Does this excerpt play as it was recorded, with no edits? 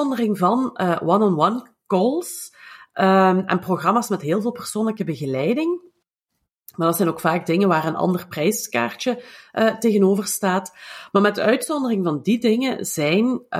yes; 0 cuts

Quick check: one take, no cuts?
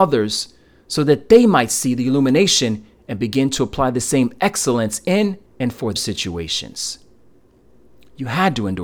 no; 2 cuts; at 5.5 s, 6.0 s

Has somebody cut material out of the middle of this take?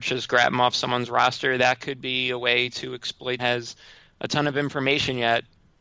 yes; 1 cut; at 3.4 s

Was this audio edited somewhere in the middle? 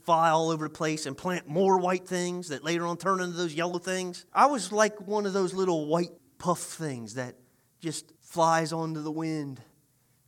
yes; 3 cuts; at 4.3 s, 6.2 s, 8.2 s

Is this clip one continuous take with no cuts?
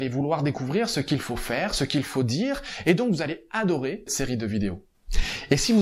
no; 1 cut; at 4.1 s

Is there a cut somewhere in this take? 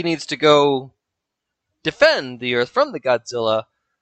no; 0 cuts

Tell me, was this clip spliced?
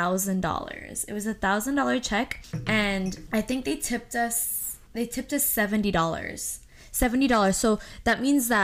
no; 0 cuts

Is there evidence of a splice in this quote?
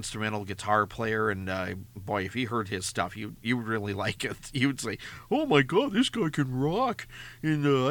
no; 0 cuts

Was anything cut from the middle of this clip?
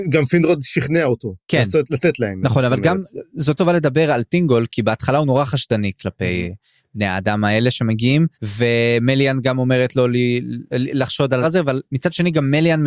yes; 3 cuts; at 3.6 s, 8.3 s, 11.4 s

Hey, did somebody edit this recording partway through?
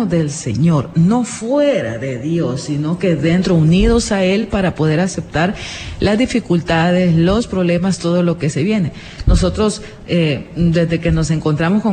no; 0 cuts

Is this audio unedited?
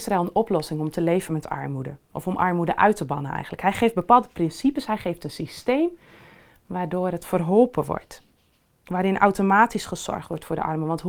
yes; 0 cuts

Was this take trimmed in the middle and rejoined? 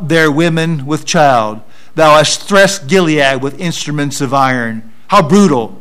no; 0 cuts

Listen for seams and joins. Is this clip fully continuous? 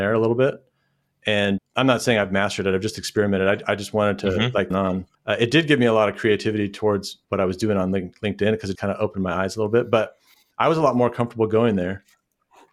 no; 5 cuts; at 1.6 s, 4.7 s, 5.1 s, 7.2 s, 8.8 s

